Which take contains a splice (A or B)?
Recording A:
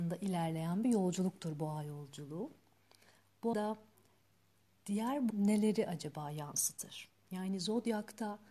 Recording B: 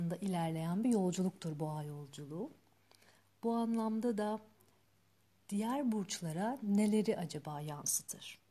A